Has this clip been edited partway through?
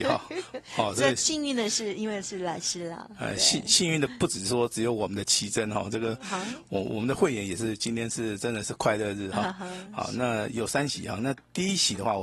no; 0 cuts

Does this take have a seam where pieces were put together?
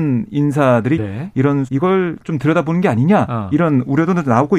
yes; 3 cuts; at 1.0 s, 1.7 s, 2.2 s

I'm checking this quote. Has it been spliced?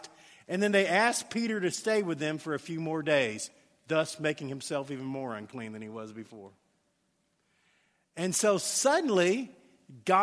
no; 0 cuts

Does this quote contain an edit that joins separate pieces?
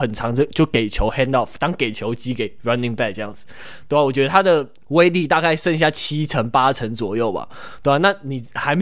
no; 0 cuts

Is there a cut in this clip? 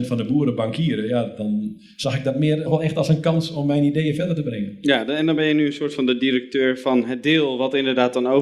yes; 1 cut; at 2.7 s

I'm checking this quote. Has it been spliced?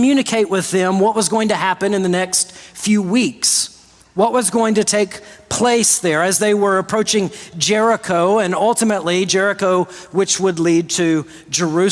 no; 0 cuts

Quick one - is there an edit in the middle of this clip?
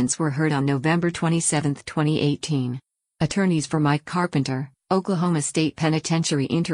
no; 0 cuts

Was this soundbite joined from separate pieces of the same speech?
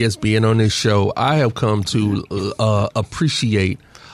no; 0 cuts

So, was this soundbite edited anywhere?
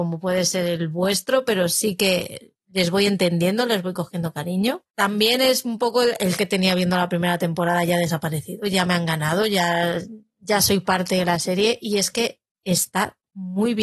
yes; 2 cuts; at 4.9 s, 6.4 s

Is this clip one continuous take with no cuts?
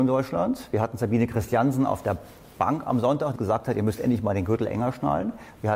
no; 1 cut; at 3.4 s

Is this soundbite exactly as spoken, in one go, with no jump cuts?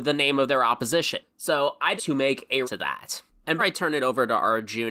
no; 3 cuts; at 2.0 s, 2.6 s, 3.6 s

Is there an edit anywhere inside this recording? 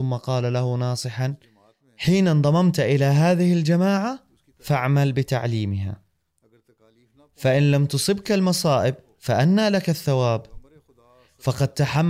no; 0 cuts

